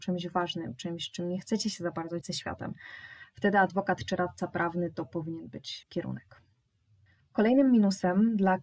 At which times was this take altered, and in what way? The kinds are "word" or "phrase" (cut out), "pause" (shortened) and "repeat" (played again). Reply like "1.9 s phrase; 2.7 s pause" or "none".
2.2 s word; 5.8 s word; 7.1 s pause